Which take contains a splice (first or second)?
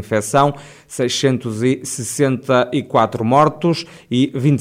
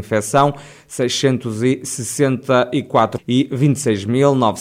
second